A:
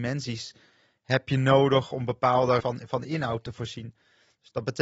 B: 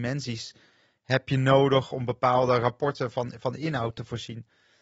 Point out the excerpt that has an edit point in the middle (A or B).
A